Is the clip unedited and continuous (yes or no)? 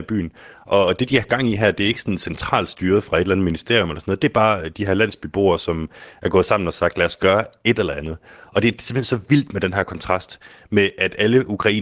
yes